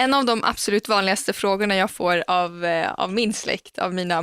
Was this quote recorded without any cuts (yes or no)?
yes